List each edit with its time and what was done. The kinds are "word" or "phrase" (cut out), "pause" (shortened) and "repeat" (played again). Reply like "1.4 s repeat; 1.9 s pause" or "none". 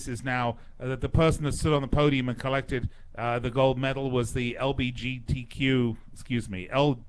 none